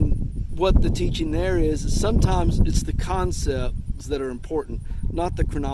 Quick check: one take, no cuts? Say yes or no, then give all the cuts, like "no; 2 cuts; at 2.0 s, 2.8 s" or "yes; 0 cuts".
no; 1 cut; at 4.0 s